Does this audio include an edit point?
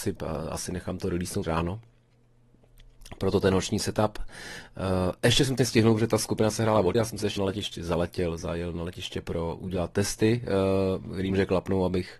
yes; 5 cuts; at 1.4 s, 5.6 s, 6.9 s, 7.4 s, 11.3 s

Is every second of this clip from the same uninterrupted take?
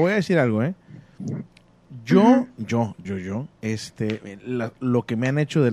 no; 2 cuts; at 3.0 s, 3.5 s

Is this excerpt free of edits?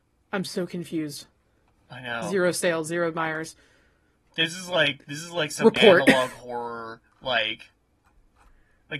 yes; 0 cuts

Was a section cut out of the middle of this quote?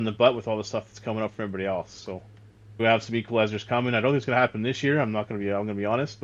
yes; 1 cut; at 2.8 s

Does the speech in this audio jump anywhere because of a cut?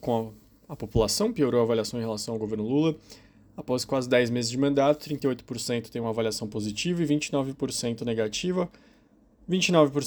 no; 0 cuts

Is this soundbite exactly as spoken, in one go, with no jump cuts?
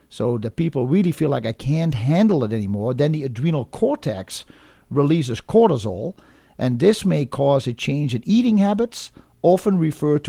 yes; 0 cuts

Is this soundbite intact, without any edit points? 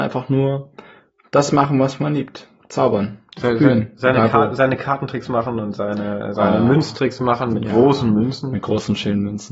yes; 0 cuts

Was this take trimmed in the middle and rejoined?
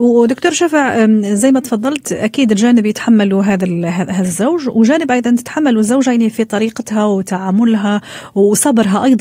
no; 0 cuts

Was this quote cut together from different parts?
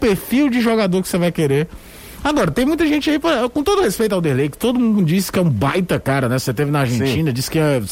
no; 0 cuts

